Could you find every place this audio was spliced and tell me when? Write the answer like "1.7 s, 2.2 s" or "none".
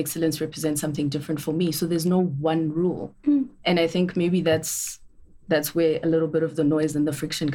3.2 s